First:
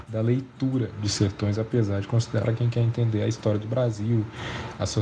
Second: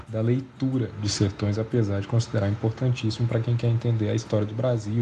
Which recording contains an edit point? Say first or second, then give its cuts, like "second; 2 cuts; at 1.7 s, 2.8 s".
first; 1 cut; at 2.4 s